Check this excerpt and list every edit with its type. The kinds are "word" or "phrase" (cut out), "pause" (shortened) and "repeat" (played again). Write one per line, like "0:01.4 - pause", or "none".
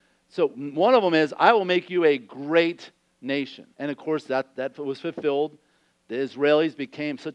0:03.7 - pause